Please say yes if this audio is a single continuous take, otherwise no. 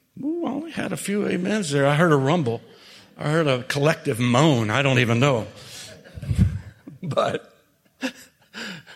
yes